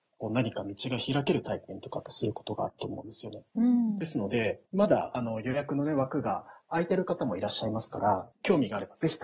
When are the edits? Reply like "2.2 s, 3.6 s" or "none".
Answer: 3.5 s, 4.6 s, 8.3 s